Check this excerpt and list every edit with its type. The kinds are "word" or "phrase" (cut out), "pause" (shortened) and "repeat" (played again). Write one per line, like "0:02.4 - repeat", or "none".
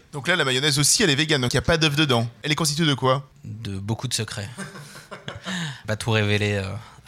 0:01.5 - word
0:05.8 - phrase